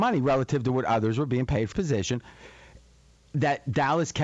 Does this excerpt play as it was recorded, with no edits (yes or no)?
no